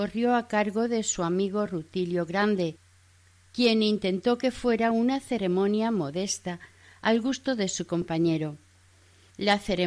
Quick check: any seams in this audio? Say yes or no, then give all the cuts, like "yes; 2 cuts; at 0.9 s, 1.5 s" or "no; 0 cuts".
no; 0 cuts